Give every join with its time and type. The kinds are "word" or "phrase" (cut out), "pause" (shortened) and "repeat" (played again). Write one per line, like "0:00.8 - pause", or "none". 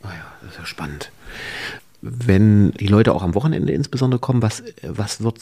none